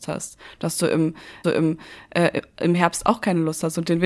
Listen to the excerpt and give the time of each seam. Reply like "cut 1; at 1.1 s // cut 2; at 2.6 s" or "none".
cut 1; at 1.4 s